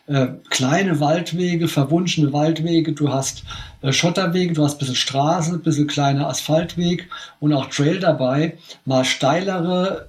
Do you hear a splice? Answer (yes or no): no